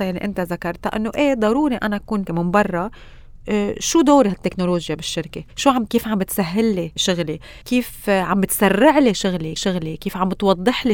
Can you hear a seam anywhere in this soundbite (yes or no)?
yes